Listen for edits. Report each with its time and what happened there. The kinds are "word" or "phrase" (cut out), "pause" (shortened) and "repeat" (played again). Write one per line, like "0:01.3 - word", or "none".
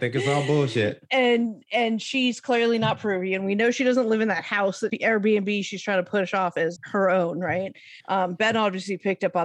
0:04.9 - phrase
0:06.8 - word
0:08.0 - pause